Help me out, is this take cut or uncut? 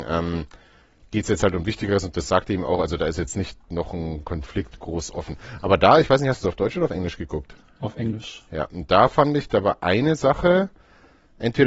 uncut